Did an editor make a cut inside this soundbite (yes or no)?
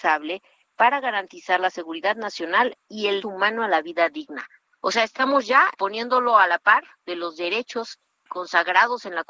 yes